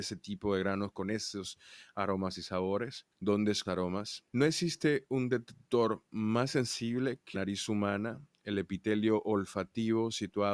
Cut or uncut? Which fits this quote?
cut